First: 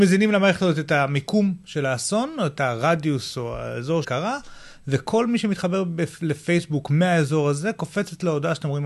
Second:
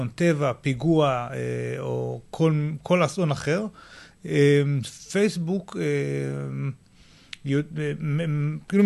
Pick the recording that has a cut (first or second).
first